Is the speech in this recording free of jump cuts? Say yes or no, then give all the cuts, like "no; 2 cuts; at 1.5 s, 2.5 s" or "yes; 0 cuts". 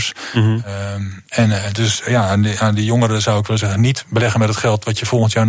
yes; 0 cuts